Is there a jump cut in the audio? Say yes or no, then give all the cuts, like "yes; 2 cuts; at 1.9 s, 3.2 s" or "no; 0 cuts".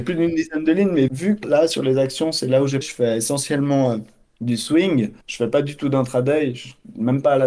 yes; 5 cuts; at 1.1 s, 1.4 s, 2.8 s, 4.3 s, 5.2 s